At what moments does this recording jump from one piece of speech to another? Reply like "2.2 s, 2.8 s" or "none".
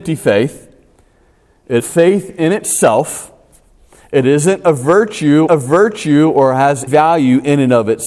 1.8 s, 5.5 s, 6.9 s